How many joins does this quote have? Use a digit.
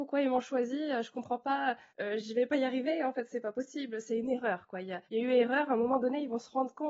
2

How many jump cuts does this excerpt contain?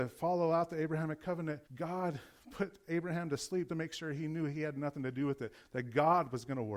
2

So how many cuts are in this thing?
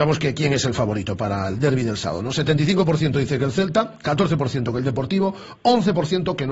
0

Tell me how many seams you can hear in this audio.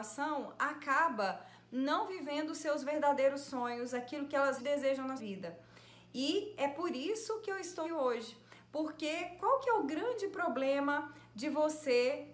3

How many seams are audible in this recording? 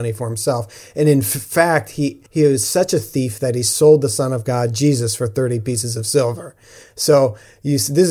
1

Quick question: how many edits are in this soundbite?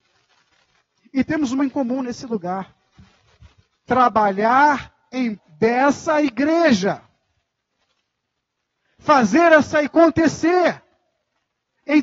3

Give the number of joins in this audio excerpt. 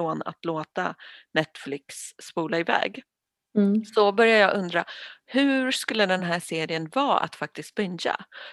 0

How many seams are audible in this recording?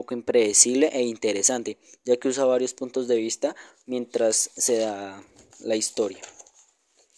0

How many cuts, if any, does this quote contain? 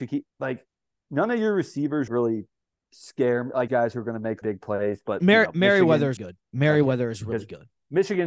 4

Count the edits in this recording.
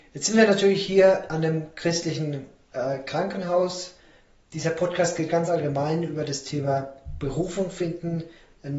0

